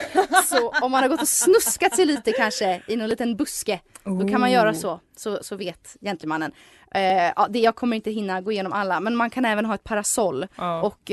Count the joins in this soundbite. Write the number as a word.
zero